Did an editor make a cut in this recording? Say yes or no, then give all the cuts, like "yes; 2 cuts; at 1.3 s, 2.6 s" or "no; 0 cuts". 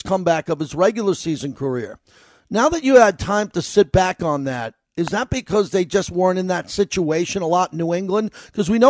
no; 0 cuts